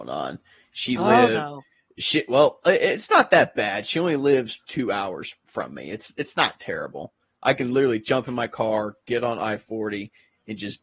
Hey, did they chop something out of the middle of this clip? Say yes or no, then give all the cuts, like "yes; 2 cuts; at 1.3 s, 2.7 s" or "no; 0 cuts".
no; 0 cuts